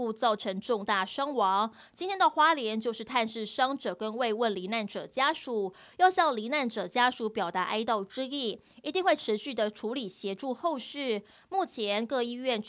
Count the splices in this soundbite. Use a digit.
0